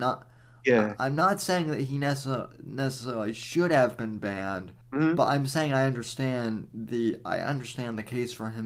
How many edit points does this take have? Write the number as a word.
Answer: one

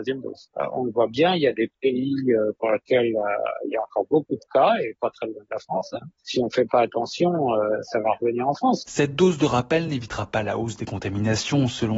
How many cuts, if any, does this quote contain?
zero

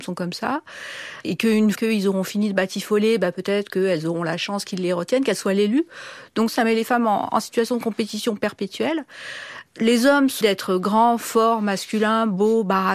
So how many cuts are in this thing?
two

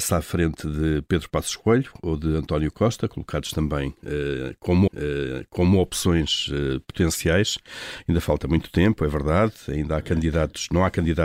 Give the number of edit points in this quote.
one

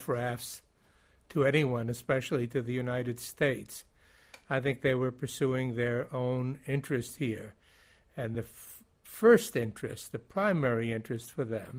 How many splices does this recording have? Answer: zero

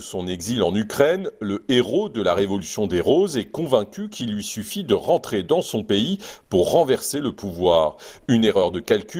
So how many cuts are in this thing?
zero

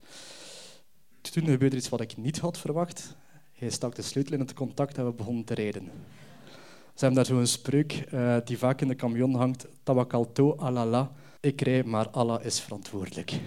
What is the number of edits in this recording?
one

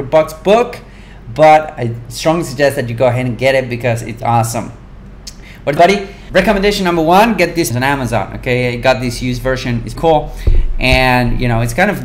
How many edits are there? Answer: five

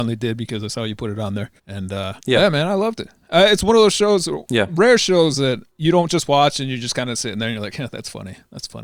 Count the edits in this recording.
three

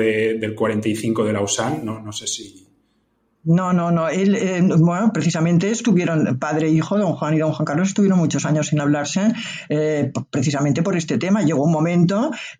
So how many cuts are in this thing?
zero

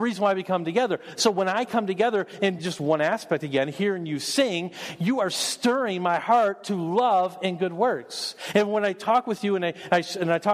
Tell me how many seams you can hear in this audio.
zero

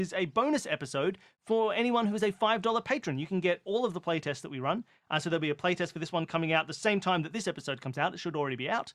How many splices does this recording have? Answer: zero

